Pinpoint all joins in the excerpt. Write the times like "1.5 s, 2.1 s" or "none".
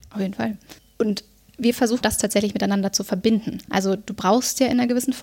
2.0 s

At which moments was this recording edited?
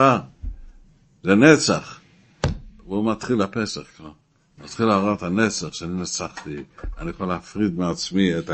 none

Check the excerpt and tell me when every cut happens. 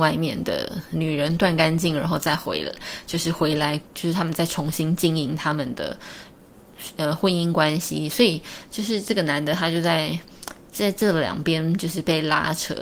3.9 s

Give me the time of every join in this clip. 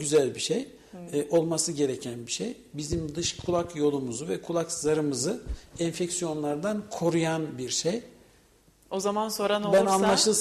none

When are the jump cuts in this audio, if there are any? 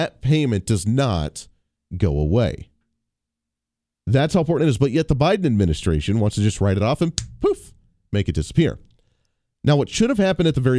none

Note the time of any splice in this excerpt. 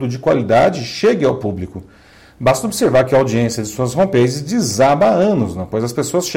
none

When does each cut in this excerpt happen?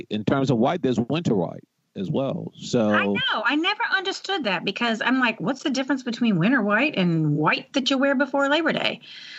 none

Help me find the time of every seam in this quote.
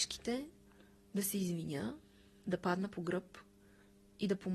none

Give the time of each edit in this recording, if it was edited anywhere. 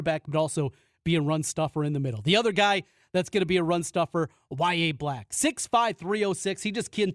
none

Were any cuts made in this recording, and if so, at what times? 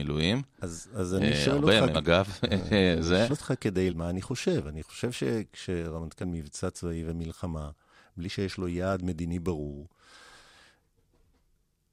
1.9 s, 3.3 s, 3.9 s, 6.2 s

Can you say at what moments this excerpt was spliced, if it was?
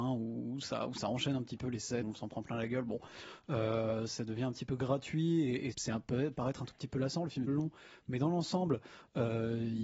2.0 s, 5.7 s, 7.5 s

